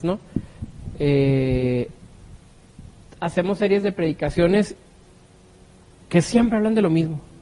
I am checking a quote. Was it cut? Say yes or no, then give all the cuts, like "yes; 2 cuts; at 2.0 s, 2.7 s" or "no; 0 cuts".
no; 0 cuts